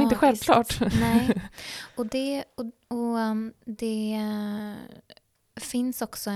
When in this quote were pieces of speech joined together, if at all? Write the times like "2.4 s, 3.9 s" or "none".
none